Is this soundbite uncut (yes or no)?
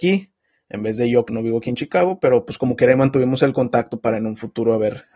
no